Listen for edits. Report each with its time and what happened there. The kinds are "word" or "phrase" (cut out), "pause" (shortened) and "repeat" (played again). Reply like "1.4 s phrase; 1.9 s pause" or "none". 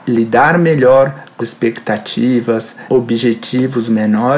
1.4 s word; 2.9 s word